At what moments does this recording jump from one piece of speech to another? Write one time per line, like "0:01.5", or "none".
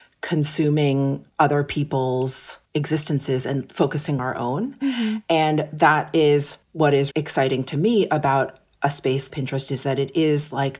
0:01.3
0:02.7
0:04.2
0:06.6
0:07.1
0:09.3